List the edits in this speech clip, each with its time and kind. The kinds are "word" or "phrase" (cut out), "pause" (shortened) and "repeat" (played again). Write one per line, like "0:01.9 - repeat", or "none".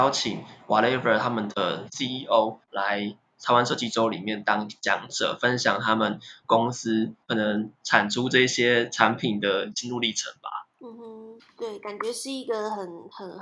0:02.6 - pause
0:07.2 - pause
0:10.7 - pause
0:11.4 - pause